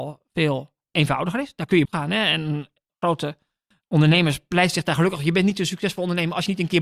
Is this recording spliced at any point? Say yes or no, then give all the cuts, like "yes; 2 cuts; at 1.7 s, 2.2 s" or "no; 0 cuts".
yes; 2 cuts; at 1.8 s, 3.8 s